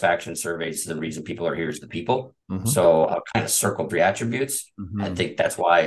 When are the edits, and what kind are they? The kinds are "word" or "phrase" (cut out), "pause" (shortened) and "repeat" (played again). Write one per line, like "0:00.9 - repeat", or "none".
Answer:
0:02.4 - pause
0:03.9 - phrase

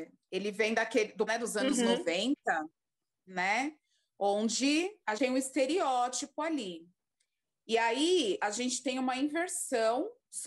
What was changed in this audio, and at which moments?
0:01.3 - word
0:05.2 - word
0:08.4 - word

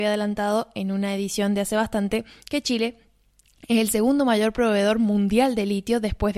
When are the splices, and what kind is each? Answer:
none

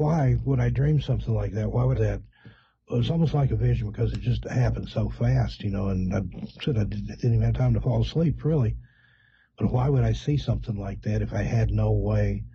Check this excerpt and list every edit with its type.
0:01.9 - phrase

